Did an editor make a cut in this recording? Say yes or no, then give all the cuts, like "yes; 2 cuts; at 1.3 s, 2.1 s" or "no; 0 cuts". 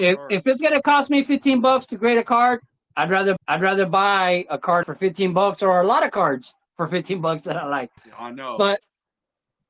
yes; 3 cuts; at 3.4 s, 4.8 s, 8.0 s